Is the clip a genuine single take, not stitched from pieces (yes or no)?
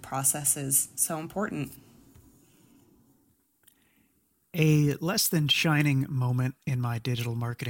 yes